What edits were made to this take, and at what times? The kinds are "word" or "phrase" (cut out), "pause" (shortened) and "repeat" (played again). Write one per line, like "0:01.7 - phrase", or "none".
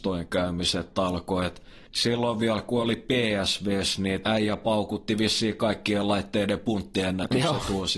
0:04.2 - word